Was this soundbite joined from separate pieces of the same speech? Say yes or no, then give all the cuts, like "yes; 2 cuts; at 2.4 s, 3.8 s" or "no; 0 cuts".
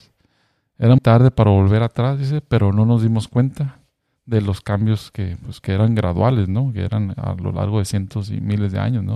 yes; 1 cut; at 1.0 s